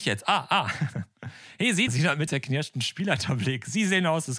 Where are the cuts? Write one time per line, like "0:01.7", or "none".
0:01.9
0:02.3